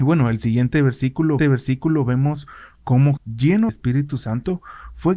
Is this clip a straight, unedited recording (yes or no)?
no